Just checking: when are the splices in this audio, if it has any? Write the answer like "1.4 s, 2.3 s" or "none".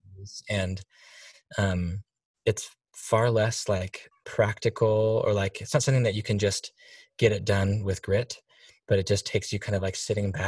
4.1 s

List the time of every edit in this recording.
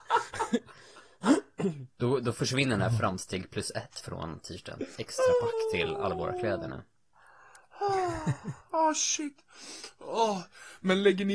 4.9 s

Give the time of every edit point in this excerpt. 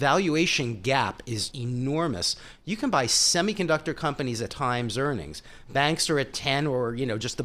1.5 s, 4.5 s

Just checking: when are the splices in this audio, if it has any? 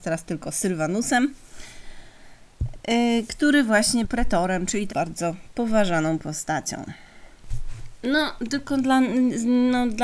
4.0 s, 4.9 s

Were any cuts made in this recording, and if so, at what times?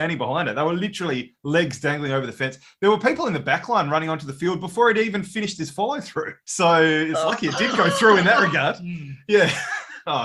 none

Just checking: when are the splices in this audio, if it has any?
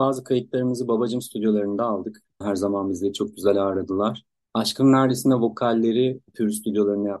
none

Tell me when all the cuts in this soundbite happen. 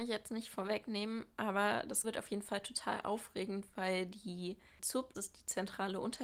2.0 s, 5.1 s

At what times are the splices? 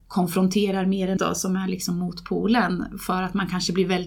1.2 s

